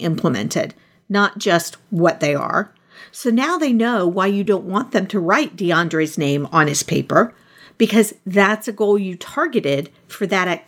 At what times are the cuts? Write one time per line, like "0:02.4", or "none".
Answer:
none